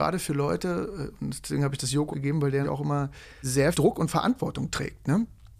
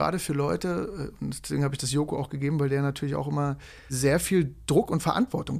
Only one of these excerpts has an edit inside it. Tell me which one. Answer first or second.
first